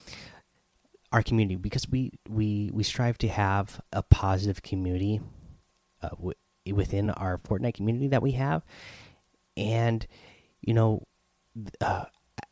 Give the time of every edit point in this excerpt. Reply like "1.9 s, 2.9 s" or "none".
none